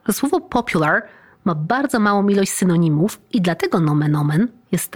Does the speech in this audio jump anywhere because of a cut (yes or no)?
no